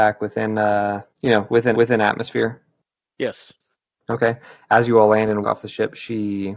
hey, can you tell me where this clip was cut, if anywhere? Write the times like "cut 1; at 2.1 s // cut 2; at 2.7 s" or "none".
cut 1; at 1.1 s // cut 2; at 1.7 s // cut 3; at 3.8 s // cut 4; at 5.4 s